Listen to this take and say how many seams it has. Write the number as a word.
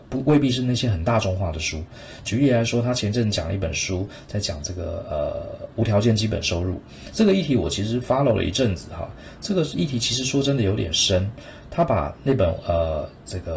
zero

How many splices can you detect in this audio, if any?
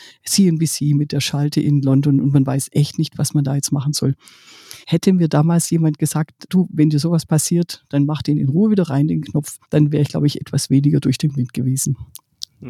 two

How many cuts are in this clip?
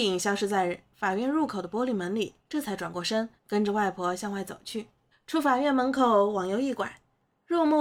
three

